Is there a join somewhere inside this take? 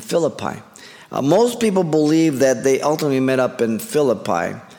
no; 0 cuts

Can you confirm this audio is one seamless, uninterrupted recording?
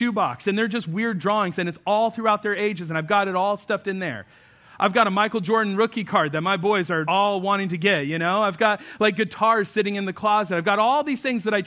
no; 1 cut; at 7.0 s

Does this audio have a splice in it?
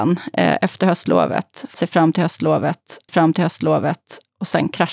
yes; 2 cuts; at 1.7 s, 3.1 s

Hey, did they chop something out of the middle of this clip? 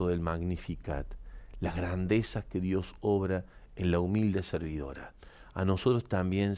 no; 0 cuts

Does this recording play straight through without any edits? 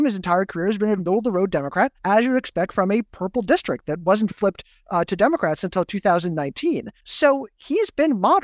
no; 3 cuts; at 1.0 s, 2.0 s, 7.0 s

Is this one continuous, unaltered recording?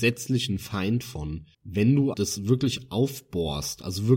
no; 2 cuts; at 1.5 s, 2.1 s

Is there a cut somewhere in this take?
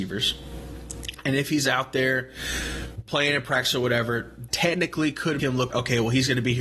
yes; 3 cuts; at 4.5 s, 5.4 s, 5.7 s

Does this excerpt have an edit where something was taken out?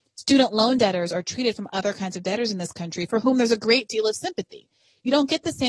no; 0 cuts

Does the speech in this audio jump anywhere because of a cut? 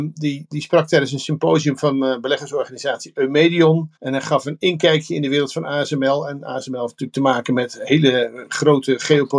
yes; 1 cut; at 4.0 s

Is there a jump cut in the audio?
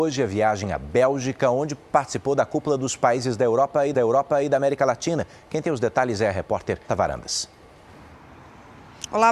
yes; 2 cuts; at 3.9 s, 6.9 s

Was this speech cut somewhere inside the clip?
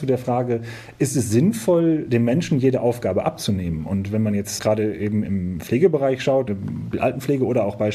yes; 4 cuts; at 4.6 s, 5.2 s, 6.5 s, 6.9 s

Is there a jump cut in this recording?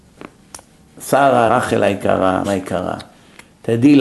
yes; 2 cuts; at 1.5 s, 2.4 s

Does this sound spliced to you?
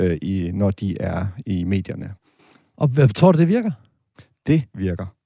no; 0 cuts

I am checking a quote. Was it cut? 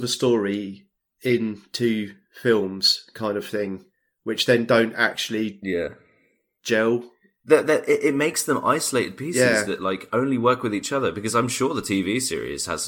no; 0 cuts

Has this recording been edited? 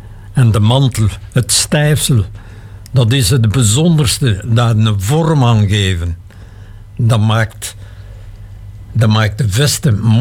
no; 0 cuts

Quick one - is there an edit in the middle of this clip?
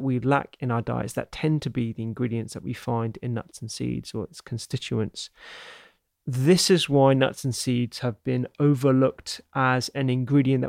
no; 0 cuts

